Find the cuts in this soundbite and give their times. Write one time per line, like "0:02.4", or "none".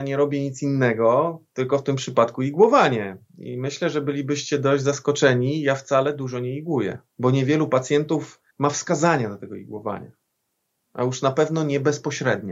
0:07.1
0:08.5